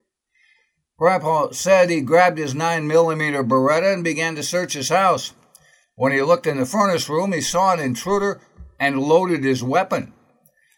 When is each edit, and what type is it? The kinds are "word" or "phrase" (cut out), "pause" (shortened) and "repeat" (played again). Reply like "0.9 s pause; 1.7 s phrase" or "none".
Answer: none